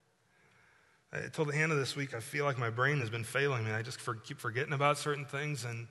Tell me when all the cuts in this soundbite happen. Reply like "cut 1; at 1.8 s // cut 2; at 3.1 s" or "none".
none